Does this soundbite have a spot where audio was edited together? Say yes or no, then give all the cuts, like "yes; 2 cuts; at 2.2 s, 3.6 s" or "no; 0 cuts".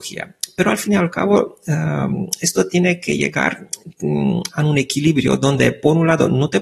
no; 0 cuts